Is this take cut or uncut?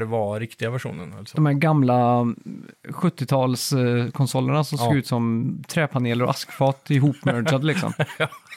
uncut